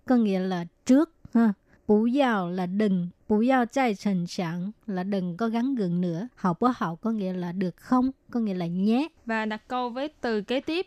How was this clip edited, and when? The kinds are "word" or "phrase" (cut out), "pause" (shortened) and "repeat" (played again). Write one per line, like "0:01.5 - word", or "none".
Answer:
0:01.8 - pause
0:03.2 - pause
0:06.3 - pause
0:09.2 - pause